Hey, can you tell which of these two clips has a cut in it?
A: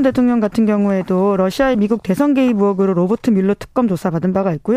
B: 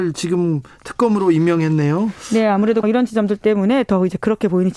B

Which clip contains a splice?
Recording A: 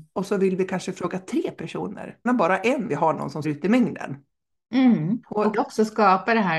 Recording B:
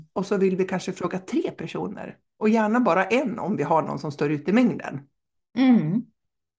A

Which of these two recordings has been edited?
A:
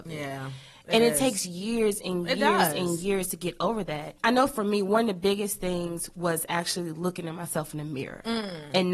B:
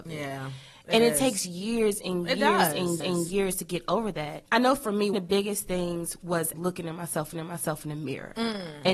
B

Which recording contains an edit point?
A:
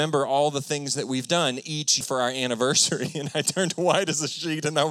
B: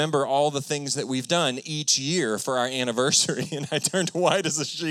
A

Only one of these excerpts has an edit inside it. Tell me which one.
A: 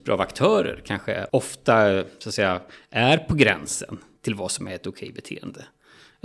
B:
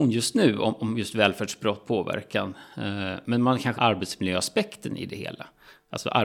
B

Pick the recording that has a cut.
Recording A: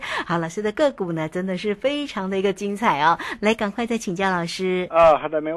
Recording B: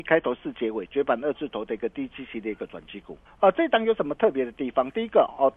B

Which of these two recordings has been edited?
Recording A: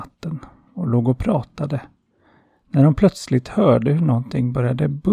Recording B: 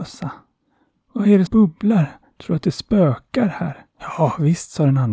B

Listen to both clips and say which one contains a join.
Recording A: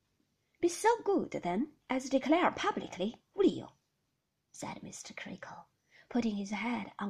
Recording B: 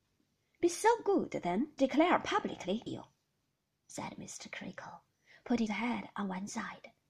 B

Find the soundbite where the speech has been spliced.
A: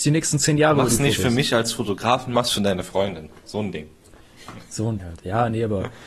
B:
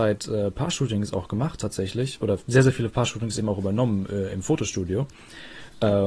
A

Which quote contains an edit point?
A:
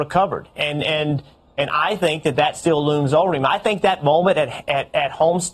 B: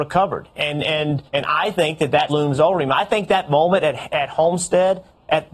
B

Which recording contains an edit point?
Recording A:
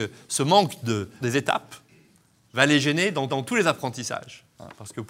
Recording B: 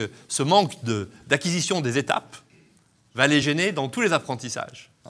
A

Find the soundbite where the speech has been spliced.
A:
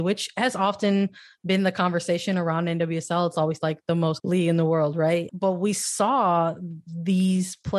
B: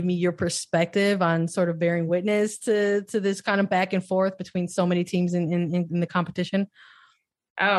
A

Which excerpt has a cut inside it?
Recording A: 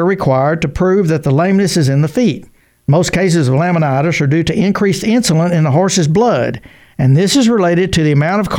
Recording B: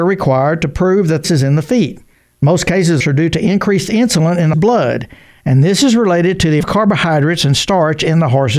B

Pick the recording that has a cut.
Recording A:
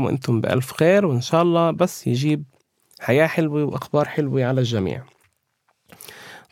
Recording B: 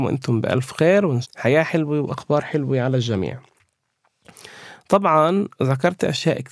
B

